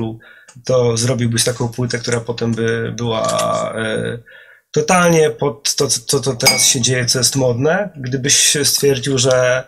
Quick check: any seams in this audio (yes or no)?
no